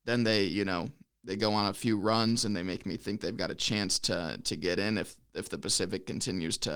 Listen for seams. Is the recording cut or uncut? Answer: uncut